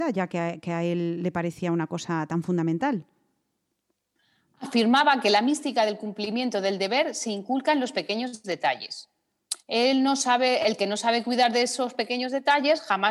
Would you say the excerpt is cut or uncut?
uncut